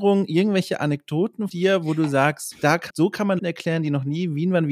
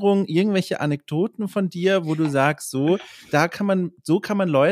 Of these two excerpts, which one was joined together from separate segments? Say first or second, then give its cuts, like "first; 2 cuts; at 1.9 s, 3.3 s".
first; 4 cuts; at 1.5 s, 2.5 s, 2.9 s, 3.4 s